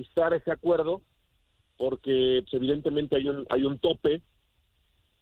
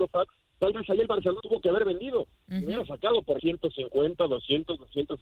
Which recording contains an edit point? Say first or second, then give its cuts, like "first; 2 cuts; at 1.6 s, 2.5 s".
second; 3 cuts; at 1.4 s, 2.4 s, 3.4 s